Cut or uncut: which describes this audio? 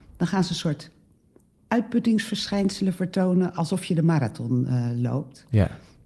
uncut